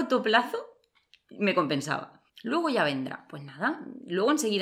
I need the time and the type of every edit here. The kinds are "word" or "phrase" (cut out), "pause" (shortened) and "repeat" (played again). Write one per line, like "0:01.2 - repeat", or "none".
0:02.3 - pause